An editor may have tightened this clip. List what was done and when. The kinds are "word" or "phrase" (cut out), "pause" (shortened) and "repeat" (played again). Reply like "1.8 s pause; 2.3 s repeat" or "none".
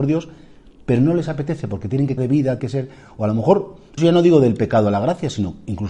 2.2 s word; 2.6 s word; 4.0 s word